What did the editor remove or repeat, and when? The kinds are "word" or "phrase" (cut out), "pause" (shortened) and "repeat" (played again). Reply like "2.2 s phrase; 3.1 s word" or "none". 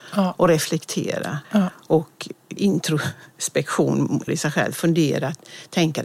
1.4 s pause; 2.6 s word; 4.3 s word